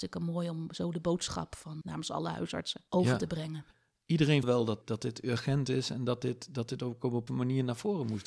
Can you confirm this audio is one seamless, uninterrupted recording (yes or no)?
no